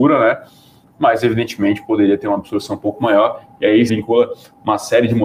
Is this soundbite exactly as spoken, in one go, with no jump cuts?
no; 1 cut; at 3.9 s

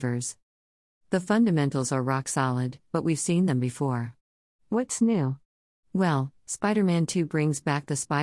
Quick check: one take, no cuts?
yes; 0 cuts

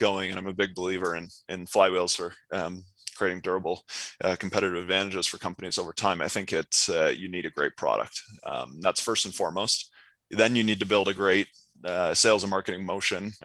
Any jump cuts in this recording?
no; 0 cuts

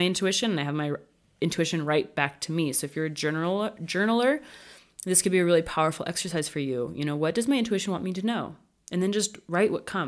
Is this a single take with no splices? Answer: yes; 0 cuts

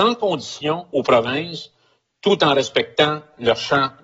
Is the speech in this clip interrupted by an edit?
no; 0 cuts

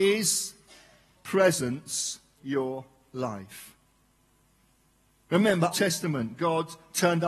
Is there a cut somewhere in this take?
yes; 3 cuts; at 1.2 s, 2.4 s, 5.7 s

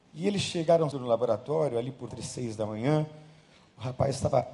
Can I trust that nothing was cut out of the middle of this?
no; 2 cuts; at 0.9 s, 2.1 s

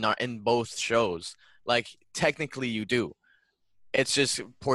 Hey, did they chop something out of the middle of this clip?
no; 0 cuts

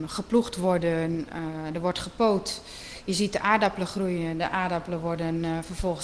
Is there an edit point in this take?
no; 0 cuts

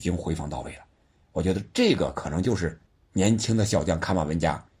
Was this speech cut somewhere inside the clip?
yes; 1 cut; at 2.9 s

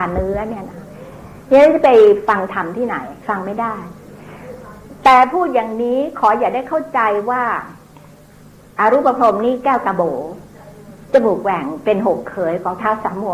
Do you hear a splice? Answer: yes; 1 cut; at 3.2 s

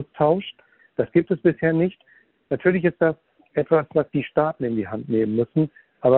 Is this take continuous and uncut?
yes; 0 cuts

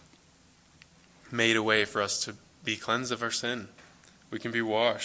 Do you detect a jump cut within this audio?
no; 0 cuts

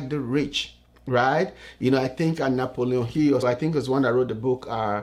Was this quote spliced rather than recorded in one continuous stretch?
yes; 1 cut; at 3.4 s

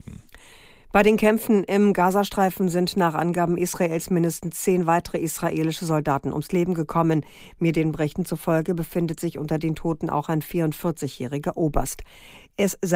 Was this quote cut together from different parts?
no; 0 cuts

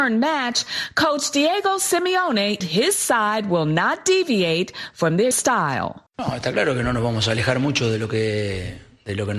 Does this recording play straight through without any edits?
no; 3 cuts; at 2.6 s, 5.3 s, 6.1 s

